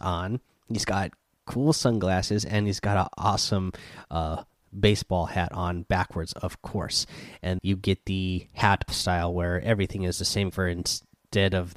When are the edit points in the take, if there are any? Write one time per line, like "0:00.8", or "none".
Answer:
0:07.6
0:08.9
0:10.5